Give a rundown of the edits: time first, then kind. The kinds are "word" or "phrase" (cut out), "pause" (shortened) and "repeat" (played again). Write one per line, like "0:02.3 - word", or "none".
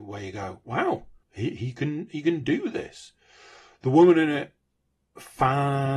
0:01.2 - pause